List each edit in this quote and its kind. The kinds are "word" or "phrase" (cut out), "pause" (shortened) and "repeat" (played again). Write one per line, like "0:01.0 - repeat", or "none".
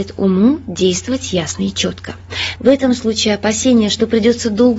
none